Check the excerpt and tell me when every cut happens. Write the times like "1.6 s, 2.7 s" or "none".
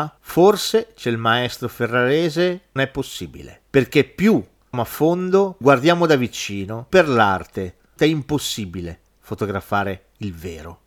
1.0 s, 2.8 s, 4.7 s, 5.6 s, 6.9 s, 8.0 s